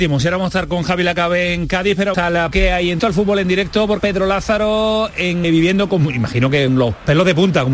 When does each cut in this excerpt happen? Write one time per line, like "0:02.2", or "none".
0:02.1
0:02.5
0:03.0
0:04.0
0:05.4
0:06.7